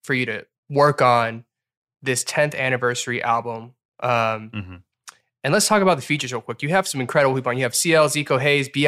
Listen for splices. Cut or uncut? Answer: uncut